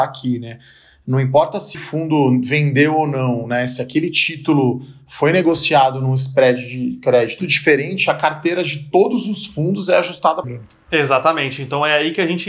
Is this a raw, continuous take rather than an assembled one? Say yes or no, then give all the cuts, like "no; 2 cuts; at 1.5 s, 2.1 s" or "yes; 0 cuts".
no; 3 cuts; at 1.7 s, 7.4 s, 10.4 s